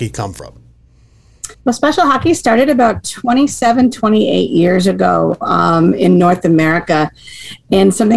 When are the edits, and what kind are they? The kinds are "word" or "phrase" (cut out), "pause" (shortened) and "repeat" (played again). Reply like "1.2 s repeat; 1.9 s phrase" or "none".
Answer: 1.5 s pause